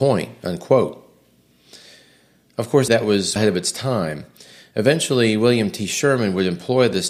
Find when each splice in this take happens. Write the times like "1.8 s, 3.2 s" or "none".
2.9 s, 3.4 s